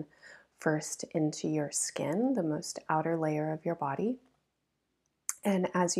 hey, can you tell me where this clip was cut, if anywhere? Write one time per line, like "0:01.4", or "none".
none